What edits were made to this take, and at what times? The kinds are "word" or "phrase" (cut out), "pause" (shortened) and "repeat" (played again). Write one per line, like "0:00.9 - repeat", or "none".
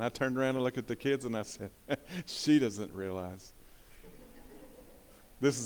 none